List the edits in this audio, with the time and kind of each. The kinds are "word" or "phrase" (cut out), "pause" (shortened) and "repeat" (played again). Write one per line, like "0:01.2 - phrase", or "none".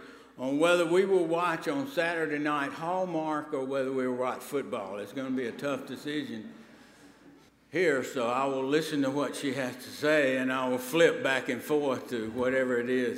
0:07.5 - pause